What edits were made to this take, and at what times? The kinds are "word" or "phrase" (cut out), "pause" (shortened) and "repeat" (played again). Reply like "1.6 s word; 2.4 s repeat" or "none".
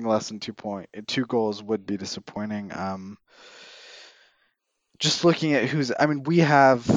none